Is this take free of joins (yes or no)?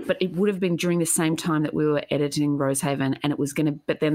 yes